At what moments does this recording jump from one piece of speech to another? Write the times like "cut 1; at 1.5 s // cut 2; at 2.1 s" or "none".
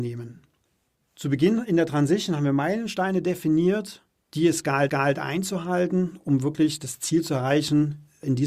cut 1; at 4.1 s // cut 2; at 4.9 s